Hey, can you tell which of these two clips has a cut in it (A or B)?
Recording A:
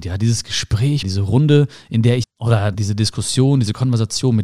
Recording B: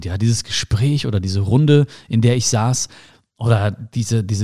A